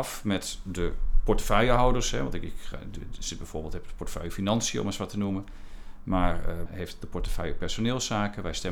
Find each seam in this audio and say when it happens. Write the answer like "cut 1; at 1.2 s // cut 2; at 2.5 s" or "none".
cut 1; at 6.7 s